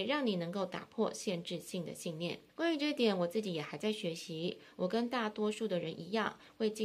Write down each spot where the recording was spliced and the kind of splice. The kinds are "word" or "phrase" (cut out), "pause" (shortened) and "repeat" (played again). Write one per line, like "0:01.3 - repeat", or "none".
0:02.5 - pause